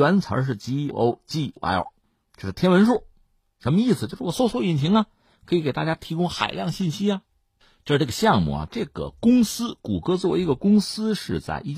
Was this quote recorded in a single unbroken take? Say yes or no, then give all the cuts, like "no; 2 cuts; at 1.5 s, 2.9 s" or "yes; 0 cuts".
no; 2 cuts; at 0.9 s, 1.6 s